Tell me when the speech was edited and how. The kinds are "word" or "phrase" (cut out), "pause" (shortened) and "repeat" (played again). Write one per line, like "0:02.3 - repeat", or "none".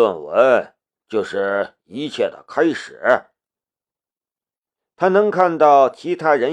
none

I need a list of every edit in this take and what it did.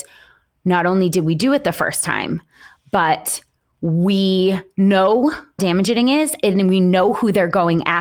0:05.6 - word

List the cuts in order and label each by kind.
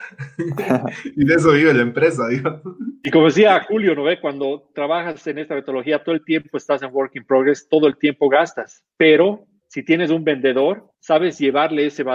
0:09.6 - pause
0:10.9 - pause

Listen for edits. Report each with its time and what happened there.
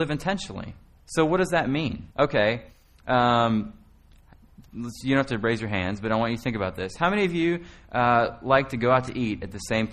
0:01.0 - pause
0:02.1 - pause

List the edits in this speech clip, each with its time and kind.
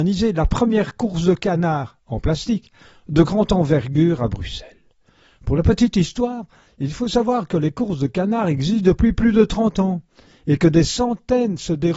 none

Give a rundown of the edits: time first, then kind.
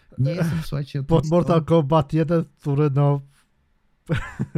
0:01.2 - phrase

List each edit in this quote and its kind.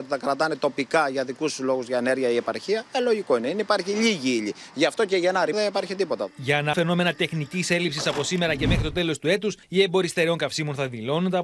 0:05.5 - word
0:06.7 - word
0:09.6 - pause

